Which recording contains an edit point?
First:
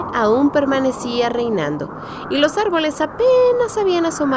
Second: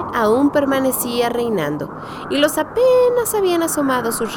second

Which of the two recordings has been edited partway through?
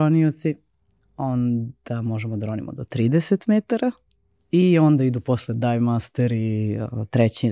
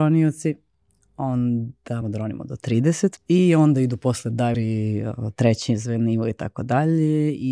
second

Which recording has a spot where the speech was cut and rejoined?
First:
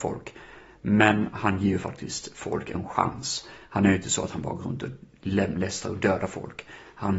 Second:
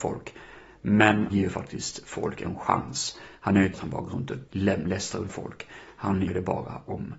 second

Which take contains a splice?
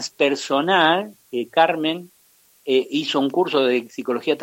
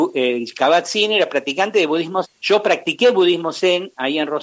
second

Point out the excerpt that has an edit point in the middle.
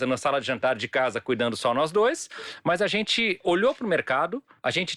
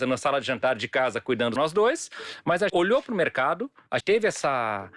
second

